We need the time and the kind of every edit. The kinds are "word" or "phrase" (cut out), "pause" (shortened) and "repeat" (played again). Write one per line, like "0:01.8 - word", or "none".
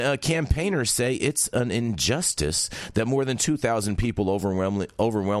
none